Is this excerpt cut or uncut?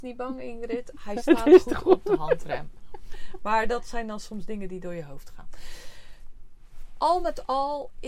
uncut